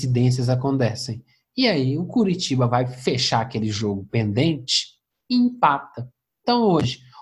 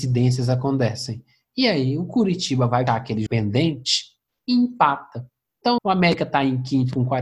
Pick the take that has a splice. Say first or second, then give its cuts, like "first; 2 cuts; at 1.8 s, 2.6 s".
second; 3 cuts; at 2.9 s, 3.3 s, 5.8 s